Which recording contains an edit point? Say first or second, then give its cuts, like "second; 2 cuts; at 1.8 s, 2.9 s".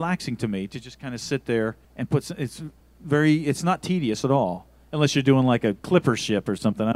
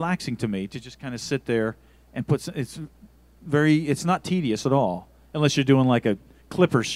first; 3 cuts; at 1.8 s, 2.8 s, 5.8 s